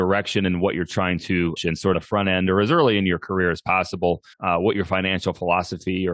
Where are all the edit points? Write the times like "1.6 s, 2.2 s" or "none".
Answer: 1.6 s, 1.9 s, 4.3 s